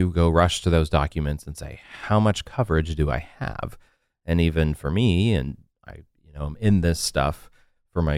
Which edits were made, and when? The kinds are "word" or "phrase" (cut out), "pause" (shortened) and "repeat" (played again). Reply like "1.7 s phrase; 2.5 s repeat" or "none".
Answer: none